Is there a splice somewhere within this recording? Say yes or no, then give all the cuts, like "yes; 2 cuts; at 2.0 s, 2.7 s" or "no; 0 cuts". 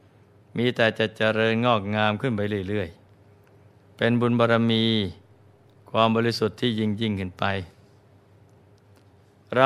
yes; 1 cut; at 3.1 s